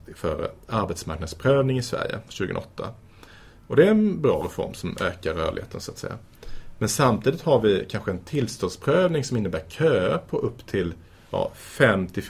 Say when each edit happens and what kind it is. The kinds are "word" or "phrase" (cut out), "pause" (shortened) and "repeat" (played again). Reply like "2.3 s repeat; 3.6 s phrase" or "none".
none